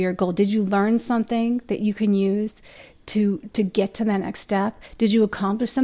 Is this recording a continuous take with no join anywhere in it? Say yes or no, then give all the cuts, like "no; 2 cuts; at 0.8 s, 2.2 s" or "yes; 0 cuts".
yes; 0 cuts